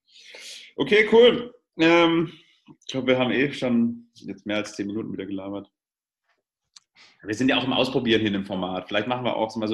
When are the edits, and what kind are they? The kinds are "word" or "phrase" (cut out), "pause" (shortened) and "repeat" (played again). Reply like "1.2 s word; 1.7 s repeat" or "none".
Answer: none